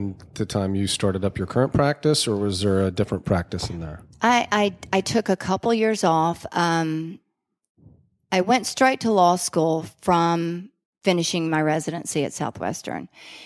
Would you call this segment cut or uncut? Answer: uncut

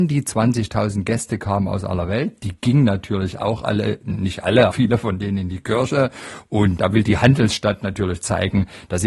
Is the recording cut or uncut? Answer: cut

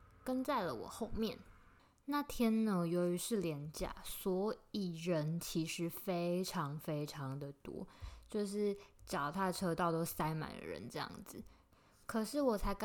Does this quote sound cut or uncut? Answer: uncut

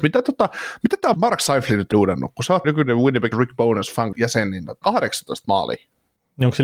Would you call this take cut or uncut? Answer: cut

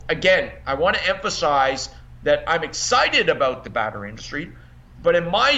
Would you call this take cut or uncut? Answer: uncut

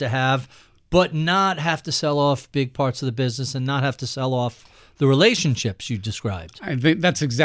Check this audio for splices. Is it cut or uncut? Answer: uncut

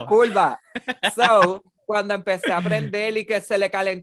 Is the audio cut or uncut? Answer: uncut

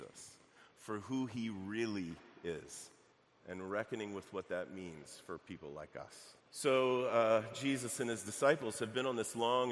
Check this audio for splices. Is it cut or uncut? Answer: cut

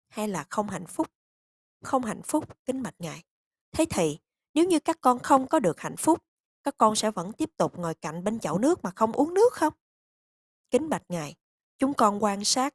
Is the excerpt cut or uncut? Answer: uncut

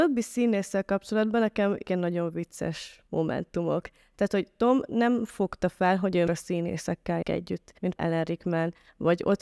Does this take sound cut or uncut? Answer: cut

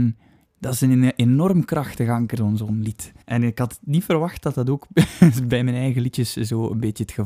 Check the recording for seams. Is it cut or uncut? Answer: cut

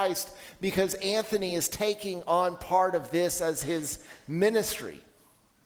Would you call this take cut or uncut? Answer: uncut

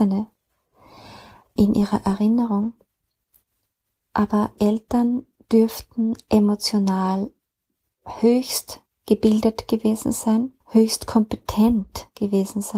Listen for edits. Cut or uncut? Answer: cut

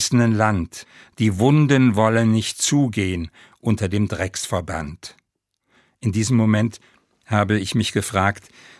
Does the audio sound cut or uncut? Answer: uncut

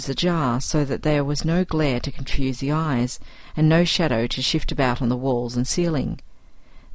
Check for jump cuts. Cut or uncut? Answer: uncut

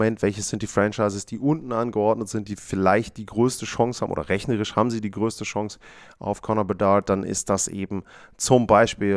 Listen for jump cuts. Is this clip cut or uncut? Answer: uncut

